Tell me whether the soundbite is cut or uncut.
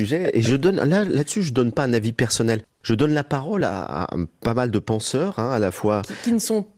uncut